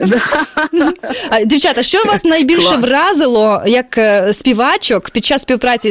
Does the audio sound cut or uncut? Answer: uncut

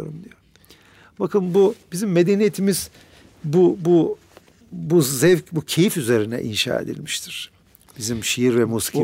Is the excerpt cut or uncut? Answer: uncut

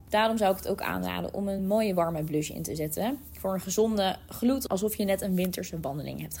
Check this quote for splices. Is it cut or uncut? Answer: uncut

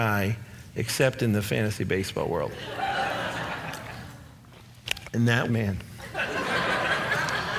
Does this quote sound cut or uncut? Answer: cut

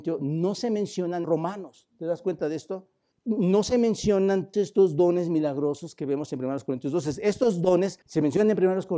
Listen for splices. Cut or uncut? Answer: cut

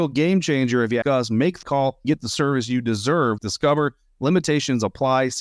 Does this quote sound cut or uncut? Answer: cut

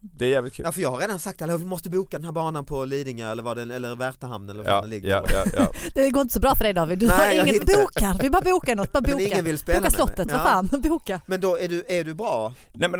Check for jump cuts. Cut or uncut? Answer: cut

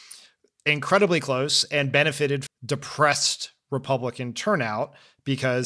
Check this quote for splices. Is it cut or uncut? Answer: cut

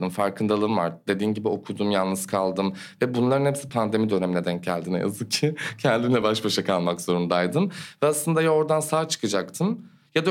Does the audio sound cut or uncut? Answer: uncut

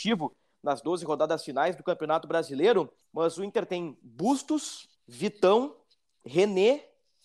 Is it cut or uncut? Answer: cut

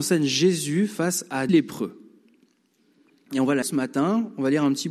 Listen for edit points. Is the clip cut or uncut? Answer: cut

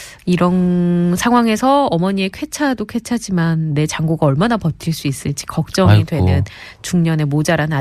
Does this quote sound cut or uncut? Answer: uncut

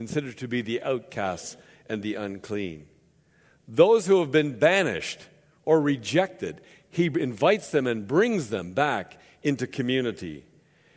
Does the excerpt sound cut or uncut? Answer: uncut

